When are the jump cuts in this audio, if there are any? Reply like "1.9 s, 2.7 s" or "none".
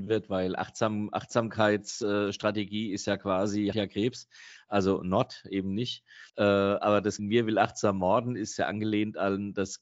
3.7 s, 6.3 s, 7.2 s